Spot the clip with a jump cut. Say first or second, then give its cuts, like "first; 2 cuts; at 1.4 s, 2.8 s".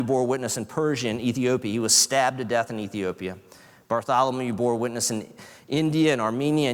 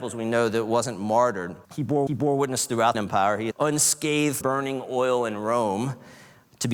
second; 5 cuts; at 1.6 s, 2.1 s, 2.9 s, 3.5 s, 4.4 s